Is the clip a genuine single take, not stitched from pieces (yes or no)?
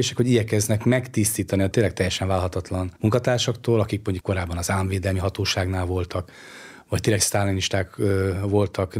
no